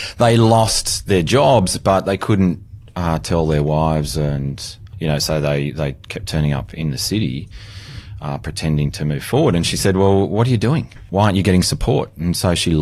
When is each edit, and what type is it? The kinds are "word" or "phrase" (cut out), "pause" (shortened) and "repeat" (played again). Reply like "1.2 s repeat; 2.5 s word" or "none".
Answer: none